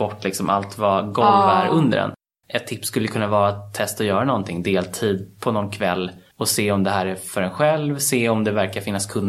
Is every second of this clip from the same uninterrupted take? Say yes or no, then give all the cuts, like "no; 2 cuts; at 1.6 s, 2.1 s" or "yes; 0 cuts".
yes; 0 cuts